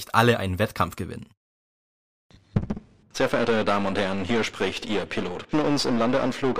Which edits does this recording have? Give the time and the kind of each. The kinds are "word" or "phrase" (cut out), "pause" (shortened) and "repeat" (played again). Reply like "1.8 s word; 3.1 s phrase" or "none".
5.5 s word